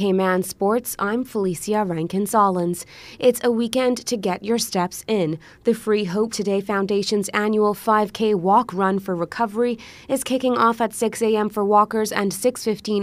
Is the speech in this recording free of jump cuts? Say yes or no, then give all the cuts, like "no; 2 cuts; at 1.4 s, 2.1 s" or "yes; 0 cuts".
no; 1 cut; at 6.3 s